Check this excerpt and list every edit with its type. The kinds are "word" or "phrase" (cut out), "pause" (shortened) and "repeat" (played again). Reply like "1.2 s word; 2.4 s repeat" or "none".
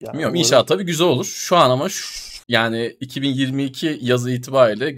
2.4 s pause